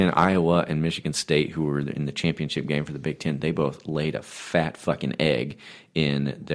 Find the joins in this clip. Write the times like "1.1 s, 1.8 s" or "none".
none

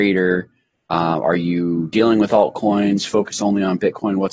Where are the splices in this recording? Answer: none

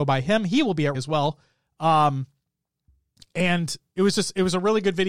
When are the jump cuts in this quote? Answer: 0.9 s

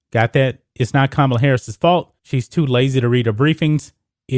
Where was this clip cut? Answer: 2.2 s

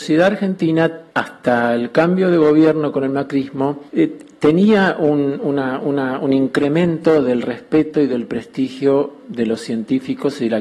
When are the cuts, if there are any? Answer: 1.1 s, 3.9 s, 5.8 s

